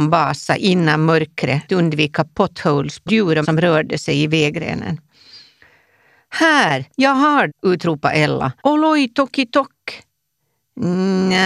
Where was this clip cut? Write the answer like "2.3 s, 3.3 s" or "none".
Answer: 1.7 s, 3.1 s, 3.4 s, 6.9 s, 7.5 s, 8.6 s